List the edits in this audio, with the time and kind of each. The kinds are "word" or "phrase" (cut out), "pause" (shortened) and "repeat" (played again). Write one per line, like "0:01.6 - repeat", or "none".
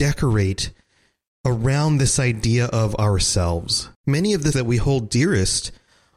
0:03.9 - pause
0:04.5 - word